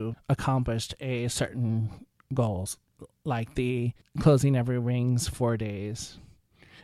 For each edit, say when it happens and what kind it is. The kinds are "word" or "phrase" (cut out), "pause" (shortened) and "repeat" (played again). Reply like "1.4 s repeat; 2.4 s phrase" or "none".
4.0 s pause